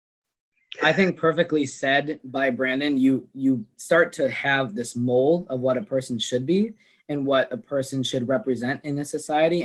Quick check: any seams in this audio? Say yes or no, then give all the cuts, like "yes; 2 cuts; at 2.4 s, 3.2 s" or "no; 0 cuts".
no; 0 cuts